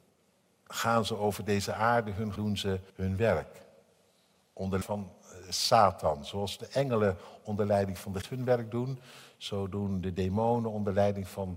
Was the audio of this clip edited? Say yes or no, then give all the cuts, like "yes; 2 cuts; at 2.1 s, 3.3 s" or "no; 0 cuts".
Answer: yes; 4 cuts; at 2.4 s, 2.9 s, 4.8 s, 8.2 s